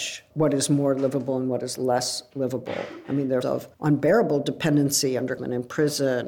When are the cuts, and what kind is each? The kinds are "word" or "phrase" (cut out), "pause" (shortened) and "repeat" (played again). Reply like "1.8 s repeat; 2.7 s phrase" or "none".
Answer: 3.4 s word; 3.7 s pause; 5.4 s word